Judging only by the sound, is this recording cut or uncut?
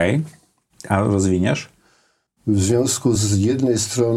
uncut